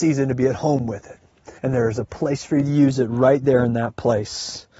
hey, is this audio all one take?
no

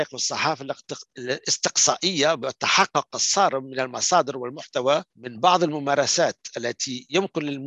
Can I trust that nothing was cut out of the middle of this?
no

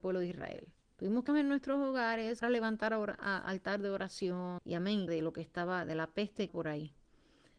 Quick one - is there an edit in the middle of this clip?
yes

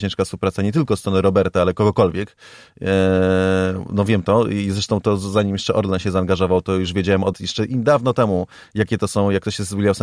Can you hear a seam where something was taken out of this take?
yes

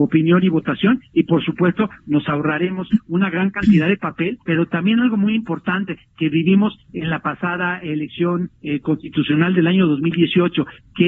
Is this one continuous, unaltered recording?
no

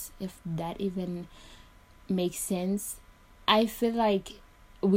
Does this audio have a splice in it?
no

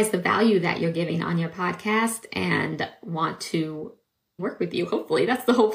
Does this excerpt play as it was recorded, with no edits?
no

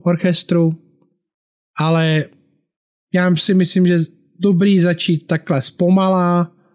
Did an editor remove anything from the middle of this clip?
no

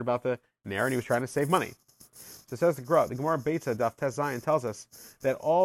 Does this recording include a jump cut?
no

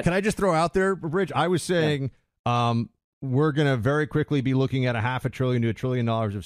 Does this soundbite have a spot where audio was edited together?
no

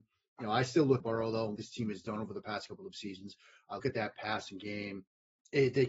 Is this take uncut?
no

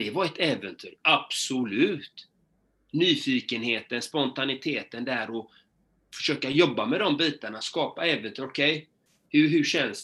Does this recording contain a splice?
no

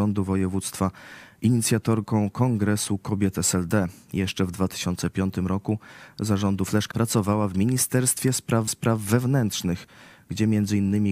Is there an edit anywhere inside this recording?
yes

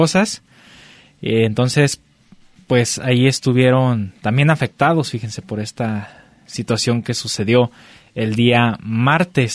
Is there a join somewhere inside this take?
no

